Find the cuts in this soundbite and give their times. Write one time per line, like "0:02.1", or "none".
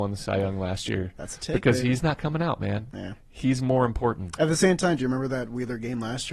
none